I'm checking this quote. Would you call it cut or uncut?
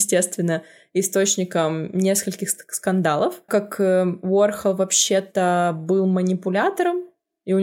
cut